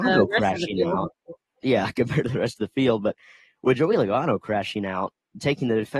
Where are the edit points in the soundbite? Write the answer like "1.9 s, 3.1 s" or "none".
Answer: none